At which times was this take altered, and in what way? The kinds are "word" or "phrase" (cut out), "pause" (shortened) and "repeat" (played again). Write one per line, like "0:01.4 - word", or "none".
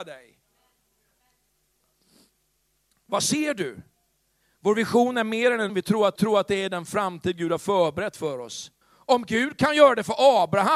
0:05.7 - word
0:06.2 - repeat
0:08.8 - pause